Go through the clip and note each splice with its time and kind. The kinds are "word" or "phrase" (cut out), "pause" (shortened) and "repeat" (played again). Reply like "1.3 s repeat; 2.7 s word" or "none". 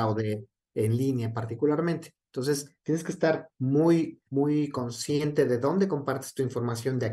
4.3 s pause